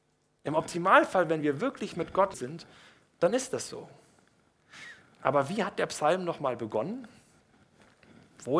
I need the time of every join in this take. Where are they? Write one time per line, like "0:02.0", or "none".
0:02.3

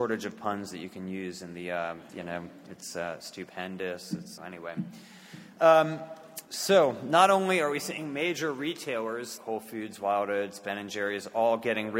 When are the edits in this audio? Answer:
0:02.1
0:04.4
0:06.5
0:09.4

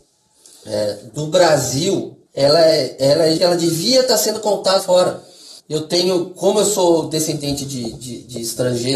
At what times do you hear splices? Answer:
0:02.3
0:03.4
0:04.8
0:05.6

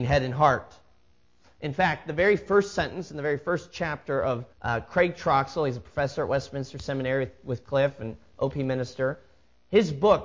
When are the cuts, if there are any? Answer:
0:04.5

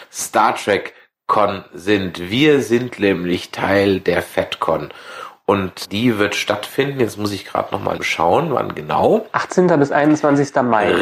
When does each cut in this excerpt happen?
0:05.8
0:08.0

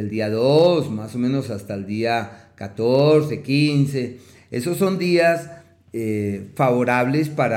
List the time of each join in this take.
none

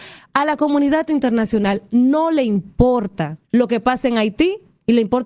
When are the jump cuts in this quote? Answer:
0:03.4

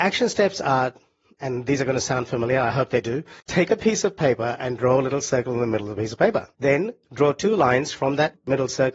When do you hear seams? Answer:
0:03.4
0:06.5

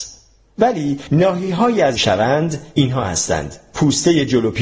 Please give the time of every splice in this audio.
0:02.0

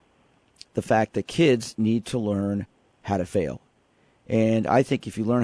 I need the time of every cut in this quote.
none

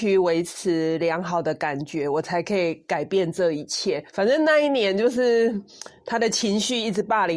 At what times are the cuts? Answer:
0:04.1

